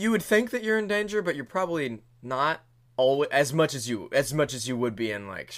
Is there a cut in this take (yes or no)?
no